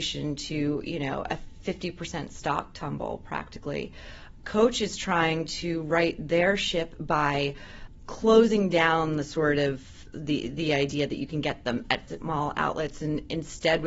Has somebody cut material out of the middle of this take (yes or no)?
yes